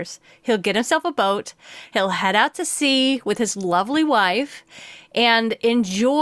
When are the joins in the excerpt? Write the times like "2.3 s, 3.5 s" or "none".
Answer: none